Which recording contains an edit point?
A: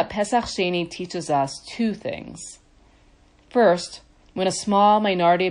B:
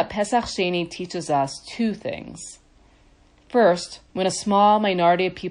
B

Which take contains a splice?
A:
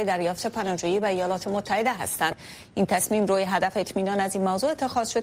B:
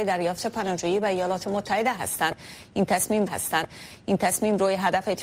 B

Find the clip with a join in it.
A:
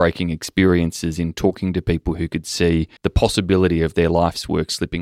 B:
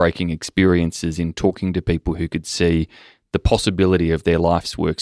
A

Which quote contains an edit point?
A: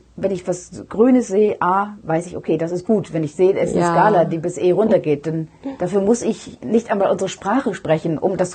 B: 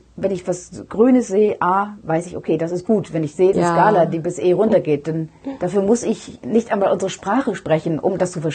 B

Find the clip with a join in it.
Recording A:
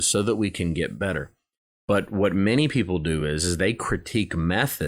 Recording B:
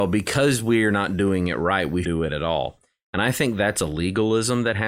B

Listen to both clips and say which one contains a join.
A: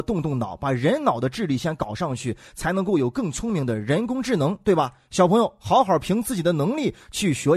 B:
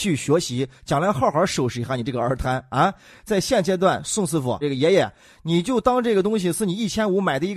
B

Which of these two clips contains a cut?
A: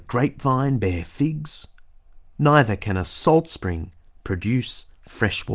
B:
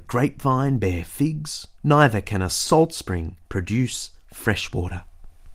B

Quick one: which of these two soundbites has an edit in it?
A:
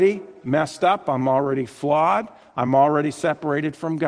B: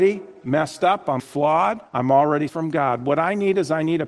B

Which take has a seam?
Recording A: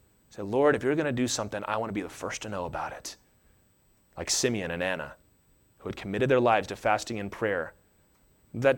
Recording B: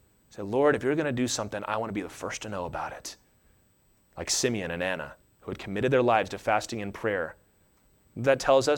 B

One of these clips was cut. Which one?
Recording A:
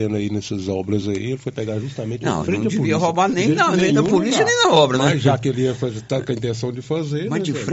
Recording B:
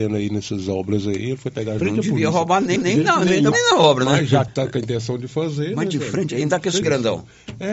B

